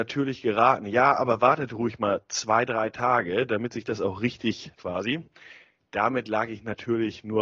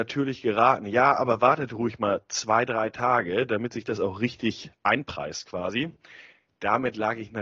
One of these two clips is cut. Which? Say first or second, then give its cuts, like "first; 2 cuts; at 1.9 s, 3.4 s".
first; 1 cut; at 4.8 s